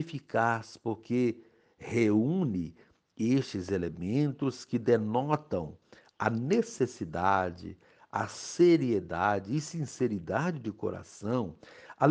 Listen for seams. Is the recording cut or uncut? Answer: uncut